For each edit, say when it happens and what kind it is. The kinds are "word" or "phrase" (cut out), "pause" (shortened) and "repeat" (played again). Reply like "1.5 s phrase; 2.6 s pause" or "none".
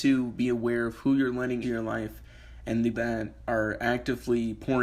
1.6 s word; 2.9 s word